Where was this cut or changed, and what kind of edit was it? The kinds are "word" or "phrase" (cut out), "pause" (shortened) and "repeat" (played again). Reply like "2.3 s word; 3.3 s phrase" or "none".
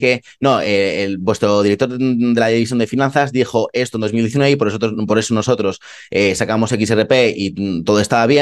none

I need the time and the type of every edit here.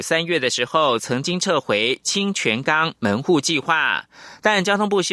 none

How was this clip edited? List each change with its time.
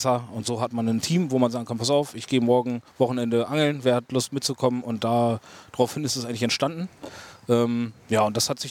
2.9 s pause

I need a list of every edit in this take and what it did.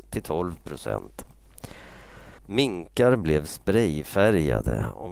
2.4 s pause

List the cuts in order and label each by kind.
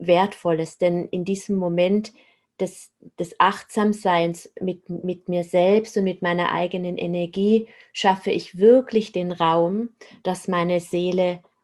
none

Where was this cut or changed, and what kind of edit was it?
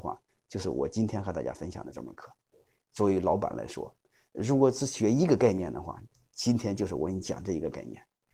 none

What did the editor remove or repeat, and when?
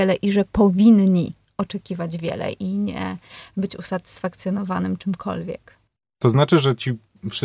none

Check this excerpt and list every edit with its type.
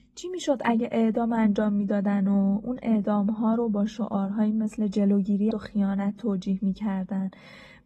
5.5 s phrase

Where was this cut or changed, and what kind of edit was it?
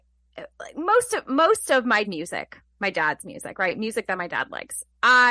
2.0 s word

